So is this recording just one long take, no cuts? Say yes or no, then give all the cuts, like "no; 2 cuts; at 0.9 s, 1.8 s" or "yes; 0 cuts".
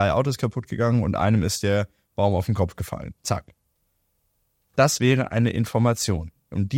yes; 0 cuts